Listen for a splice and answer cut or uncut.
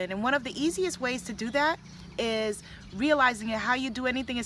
uncut